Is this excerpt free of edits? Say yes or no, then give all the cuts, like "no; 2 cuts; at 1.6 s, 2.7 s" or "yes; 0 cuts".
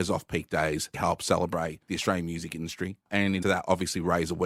no; 2 cuts; at 0.9 s, 3.4 s